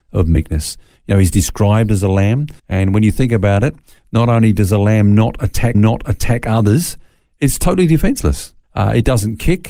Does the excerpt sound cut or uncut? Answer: cut